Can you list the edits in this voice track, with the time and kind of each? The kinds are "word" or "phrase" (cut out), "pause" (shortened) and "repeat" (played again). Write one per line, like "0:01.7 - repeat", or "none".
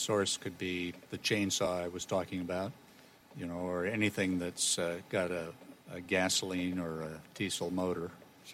0:01.1 - word
0:03.3 - word
0:05.8 - pause

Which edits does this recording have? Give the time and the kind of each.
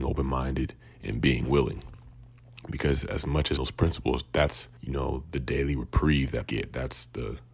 0:03.6 - phrase
0:04.8 - pause
0:06.4 - word

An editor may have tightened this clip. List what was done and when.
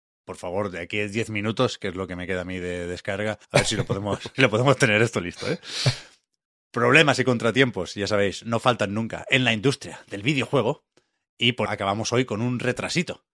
0:03.4 - pause
0:04.3 - word
0:11.7 - word

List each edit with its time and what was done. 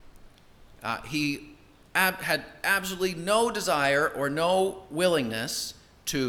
none

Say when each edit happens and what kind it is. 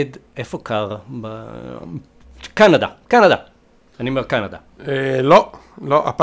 none

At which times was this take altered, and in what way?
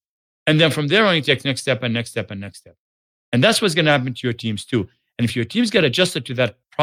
none

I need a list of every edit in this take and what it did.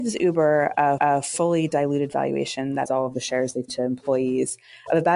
0:01.0 - repeat
0:02.9 - word
0:03.7 - word

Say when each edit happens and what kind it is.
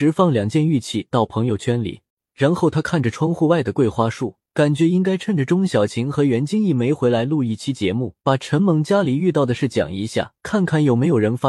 0:02.1 - pause
0:04.4 - pause
0:08.2 - pause
0:10.4 - pause

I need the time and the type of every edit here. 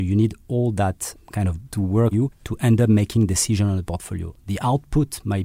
0:01.6 - word
0:02.1 - word
0:02.4 - word

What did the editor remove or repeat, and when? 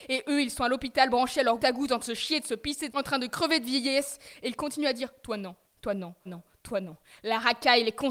0:01.6 - word
0:02.0 - word
0:02.9 - word
0:06.3 - word

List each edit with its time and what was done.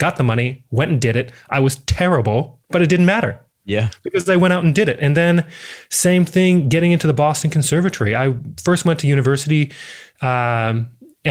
0:02.6 - pause

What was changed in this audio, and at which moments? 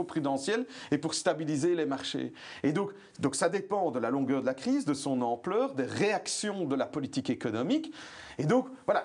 none

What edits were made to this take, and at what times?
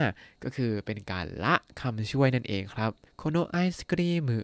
0:03.1 - pause

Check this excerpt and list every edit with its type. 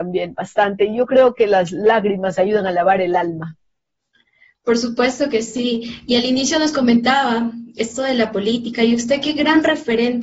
0:07.8 - word

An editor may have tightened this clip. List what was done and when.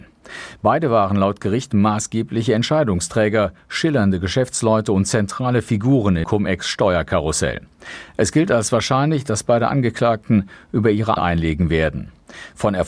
0:06.2 - word
0:11.2 - phrase

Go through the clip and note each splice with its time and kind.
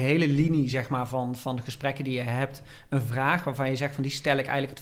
none

